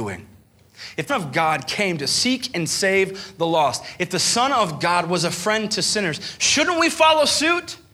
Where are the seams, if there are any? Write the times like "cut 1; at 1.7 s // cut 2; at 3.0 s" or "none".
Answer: cut 1; at 1.1 s

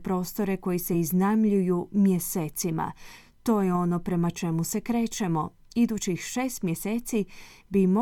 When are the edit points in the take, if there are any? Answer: none

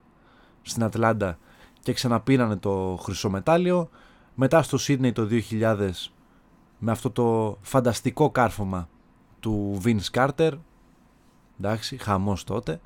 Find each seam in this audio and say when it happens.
none

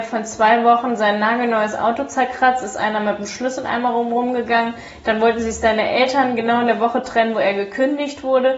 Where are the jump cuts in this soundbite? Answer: none

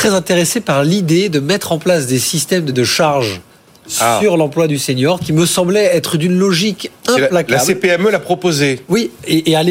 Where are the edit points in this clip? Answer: cut 1; at 2.7 s

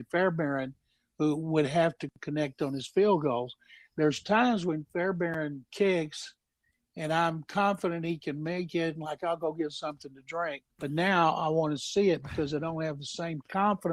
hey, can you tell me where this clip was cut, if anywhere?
cut 1; at 5.7 s // cut 2; at 10.7 s

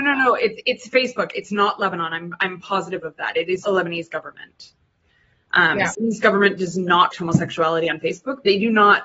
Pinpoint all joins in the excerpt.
cut 1; at 3.6 s // cut 2; at 5.9 s // cut 3; at 7.1 s

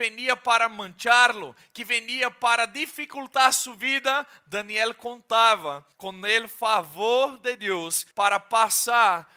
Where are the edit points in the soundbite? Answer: cut 1; at 5.9 s // cut 2; at 8.1 s

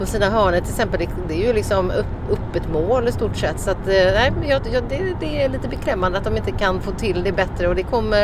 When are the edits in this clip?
cut 1; at 2.3 s

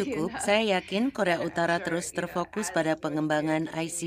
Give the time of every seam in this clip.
none

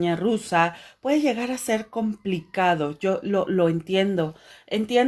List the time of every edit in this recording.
none

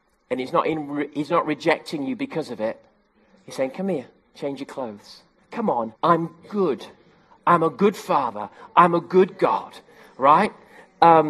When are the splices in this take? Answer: cut 1; at 4.2 s // cut 2; at 5.4 s // cut 3; at 6.0 s

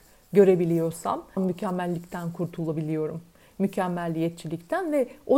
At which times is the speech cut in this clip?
cut 1; at 1.4 s

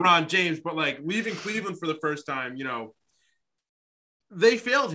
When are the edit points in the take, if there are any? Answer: none

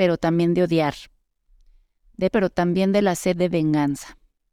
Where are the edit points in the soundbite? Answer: cut 1; at 2.3 s

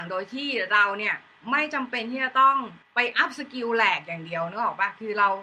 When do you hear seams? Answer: cut 1; at 2.8 s

